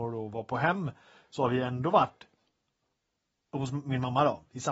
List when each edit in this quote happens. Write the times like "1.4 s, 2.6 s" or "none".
none